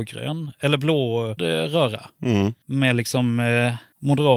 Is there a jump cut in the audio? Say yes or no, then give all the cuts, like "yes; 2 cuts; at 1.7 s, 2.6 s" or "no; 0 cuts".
yes; 1 cut; at 1.4 s